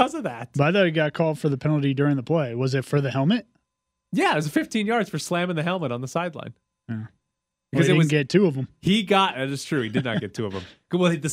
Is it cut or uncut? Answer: uncut